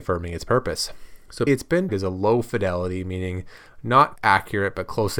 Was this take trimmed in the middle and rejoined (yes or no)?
yes